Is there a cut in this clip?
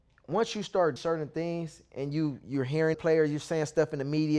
yes; 2 cuts; at 1.0 s, 2.9 s

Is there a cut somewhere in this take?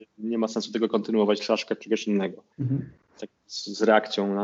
yes; 2 cuts; at 2.5 s, 3.2 s

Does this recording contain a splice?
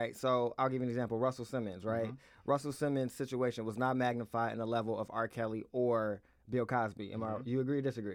no; 0 cuts

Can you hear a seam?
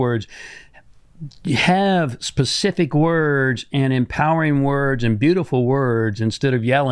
no; 0 cuts

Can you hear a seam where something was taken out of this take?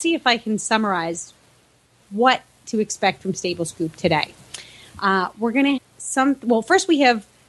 yes; 1 cut; at 5.8 s

